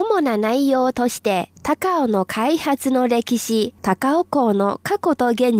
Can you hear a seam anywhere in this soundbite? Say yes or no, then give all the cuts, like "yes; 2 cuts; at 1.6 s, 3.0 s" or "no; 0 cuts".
yes; 1 cut; at 3.8 s